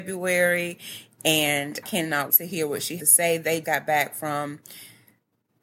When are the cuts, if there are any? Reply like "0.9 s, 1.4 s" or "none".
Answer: 1.8 s, 2.3 s, 3.0 s, 3.6 s

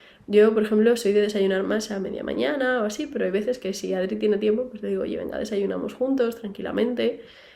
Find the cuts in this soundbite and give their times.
none

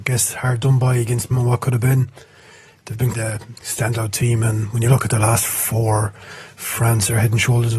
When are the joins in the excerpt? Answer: 1.3 s, 3.1 s

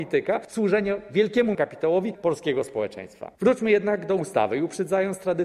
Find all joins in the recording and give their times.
1.5 s, 2.1 s

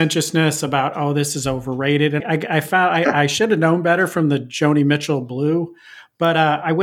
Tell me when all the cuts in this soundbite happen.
2.2 s

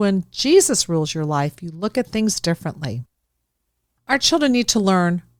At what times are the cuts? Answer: none

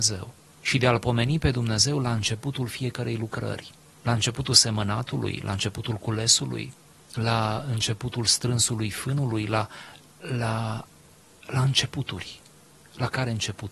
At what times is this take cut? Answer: none

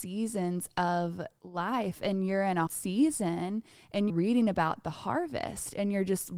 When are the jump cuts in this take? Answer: 2.7 s, 4.1 s

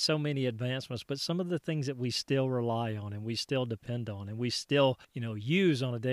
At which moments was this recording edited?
5.0 s

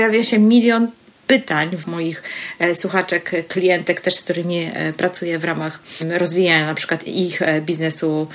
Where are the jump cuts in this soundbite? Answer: 1.8 s

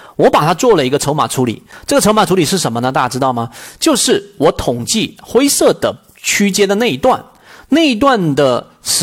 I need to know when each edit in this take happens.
none

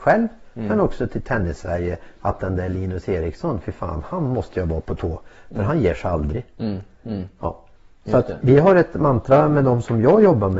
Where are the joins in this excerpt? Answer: 7.8 s, 8.4 s

